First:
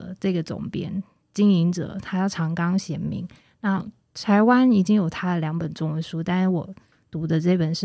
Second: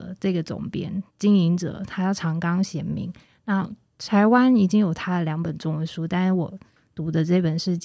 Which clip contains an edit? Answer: second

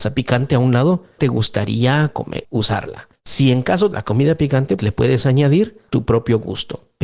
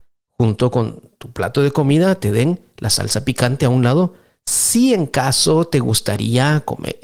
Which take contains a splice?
first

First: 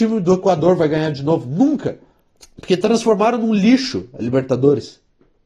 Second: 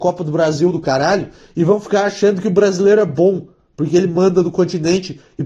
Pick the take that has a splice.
first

